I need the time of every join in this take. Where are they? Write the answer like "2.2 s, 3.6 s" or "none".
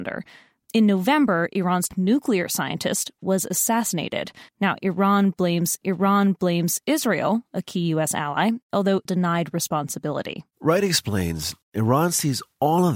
1.9 s, 4.5 s, 5.8 s, 9.1 s, 10.5 s